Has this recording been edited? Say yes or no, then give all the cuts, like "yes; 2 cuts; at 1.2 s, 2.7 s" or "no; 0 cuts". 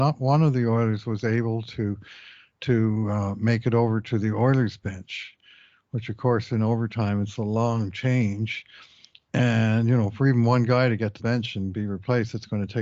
yes; 1 cut; at 11.2 s